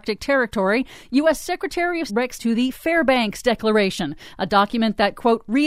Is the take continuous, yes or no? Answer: no